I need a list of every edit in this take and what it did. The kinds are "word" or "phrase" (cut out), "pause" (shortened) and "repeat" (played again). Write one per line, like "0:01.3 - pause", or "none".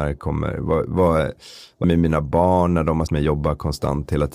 0:01.8 - word
0:03.1 - word